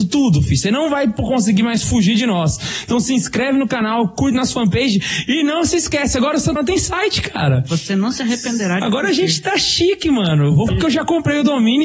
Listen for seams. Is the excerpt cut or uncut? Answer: cut